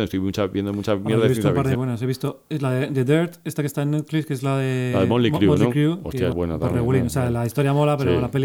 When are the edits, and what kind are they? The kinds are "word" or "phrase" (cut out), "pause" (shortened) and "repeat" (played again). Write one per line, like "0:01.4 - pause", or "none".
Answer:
0:01.7 - word
0:06.3 - phrase